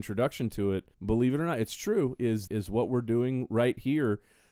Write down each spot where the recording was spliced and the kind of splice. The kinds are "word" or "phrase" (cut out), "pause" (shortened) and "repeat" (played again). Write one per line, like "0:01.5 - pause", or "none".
0:00.9 - pause
0:02.5 - word